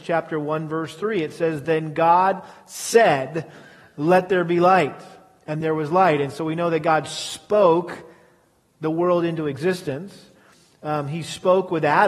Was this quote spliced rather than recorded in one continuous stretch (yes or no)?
no